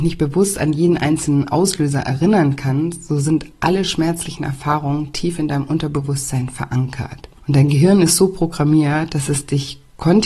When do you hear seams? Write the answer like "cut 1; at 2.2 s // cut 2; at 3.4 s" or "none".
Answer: cut 1; at 7.4 s